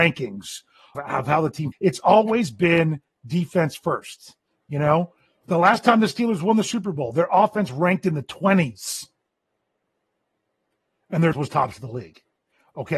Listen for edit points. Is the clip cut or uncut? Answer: cut